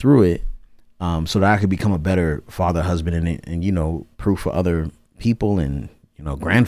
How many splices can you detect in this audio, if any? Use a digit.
1